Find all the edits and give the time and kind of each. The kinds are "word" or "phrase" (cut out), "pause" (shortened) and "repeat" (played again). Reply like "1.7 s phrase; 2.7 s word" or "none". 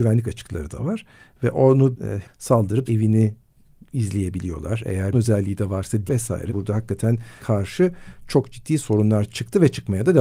1.9 s word; 2.2 s word; 2.9 s word; 5.1 s word; 6.1 s word; 6.5 s word; 7.4 s word